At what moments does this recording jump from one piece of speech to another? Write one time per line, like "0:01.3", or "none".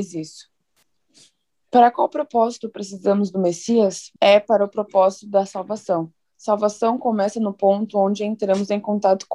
0:04.2